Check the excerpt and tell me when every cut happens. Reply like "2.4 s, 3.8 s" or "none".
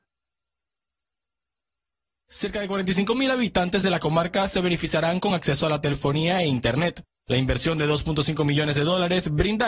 none